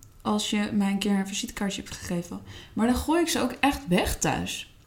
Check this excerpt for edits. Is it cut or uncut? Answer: uncut